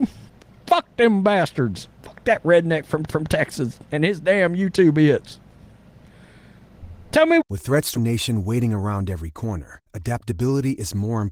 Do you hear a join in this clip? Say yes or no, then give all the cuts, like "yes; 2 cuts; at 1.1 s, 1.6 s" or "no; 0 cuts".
yes; 3 cuts; at 2.0 s, 3.1 s, 8.0 s